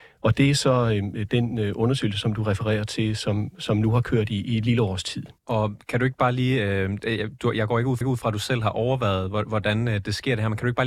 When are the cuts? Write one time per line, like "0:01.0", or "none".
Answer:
0:05.4
0:08.0